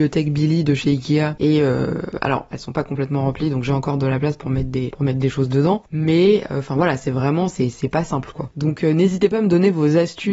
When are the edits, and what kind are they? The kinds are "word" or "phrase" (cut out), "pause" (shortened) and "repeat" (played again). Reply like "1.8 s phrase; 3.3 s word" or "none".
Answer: none

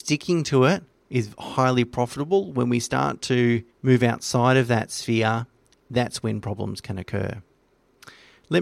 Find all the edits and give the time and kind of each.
3.7 s pause

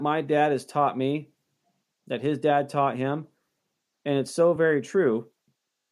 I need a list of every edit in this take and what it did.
none

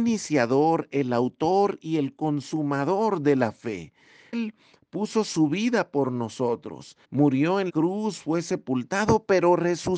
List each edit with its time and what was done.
4.3 s word; 7.0 s pause; 7.7 s word

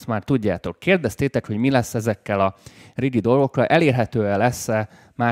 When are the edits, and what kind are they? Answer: none

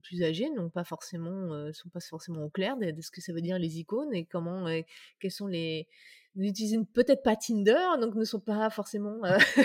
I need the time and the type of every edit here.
none

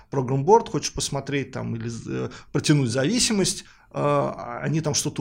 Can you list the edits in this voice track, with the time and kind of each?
none

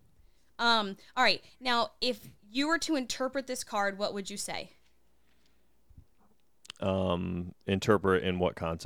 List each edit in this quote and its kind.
none

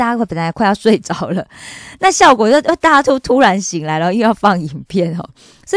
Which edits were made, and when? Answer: none

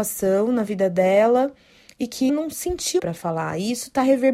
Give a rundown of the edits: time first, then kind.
2.3 s word; 3.0 s word

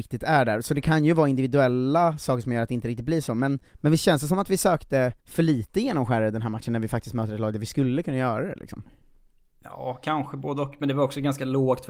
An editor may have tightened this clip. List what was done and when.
3.7 s pause; 5.2 s pause

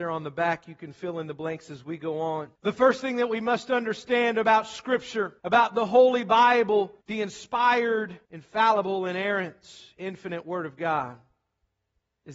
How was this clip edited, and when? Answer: 2.5 s pause; 5.4 s pause; 7.0 s pause; 8.2 s pause

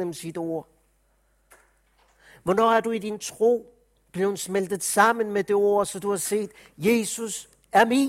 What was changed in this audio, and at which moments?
none

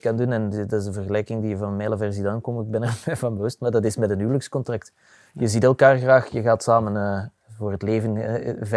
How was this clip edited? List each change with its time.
none

